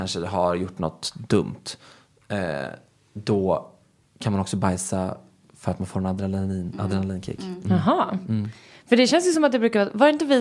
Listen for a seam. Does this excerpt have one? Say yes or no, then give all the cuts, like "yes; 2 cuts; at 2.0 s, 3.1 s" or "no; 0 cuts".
no; 0 cuts